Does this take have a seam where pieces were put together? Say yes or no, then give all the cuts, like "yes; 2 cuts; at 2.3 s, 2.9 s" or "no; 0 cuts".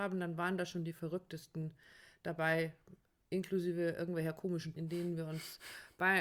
yes; 1 cut; at 4.8 s